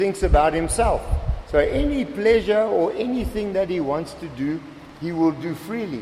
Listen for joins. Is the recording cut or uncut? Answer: uncut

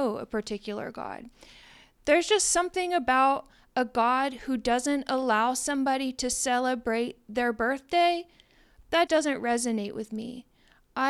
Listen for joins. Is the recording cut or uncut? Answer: cut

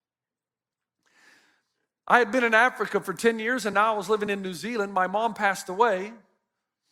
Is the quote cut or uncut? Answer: uncut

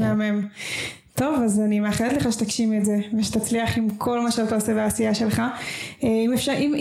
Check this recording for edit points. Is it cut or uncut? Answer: uncut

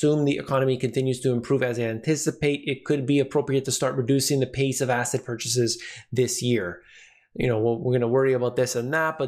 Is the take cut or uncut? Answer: uncut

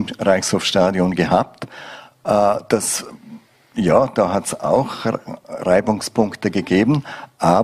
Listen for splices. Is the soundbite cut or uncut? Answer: uncut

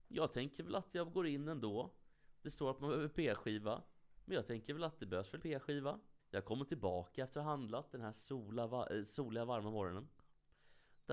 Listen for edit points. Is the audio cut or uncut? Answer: cut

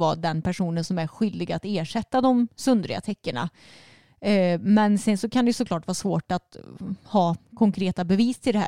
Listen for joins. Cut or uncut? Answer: uncut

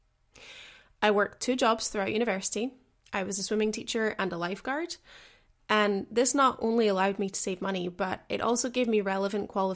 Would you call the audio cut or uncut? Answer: uncut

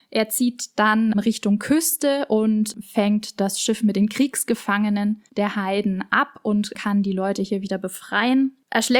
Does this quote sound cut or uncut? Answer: cut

